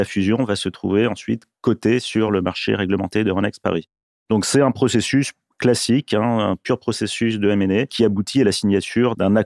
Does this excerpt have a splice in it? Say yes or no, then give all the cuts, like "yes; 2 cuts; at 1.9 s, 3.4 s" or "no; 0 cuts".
no; 0 cuts